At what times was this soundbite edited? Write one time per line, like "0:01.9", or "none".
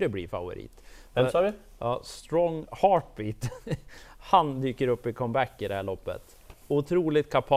none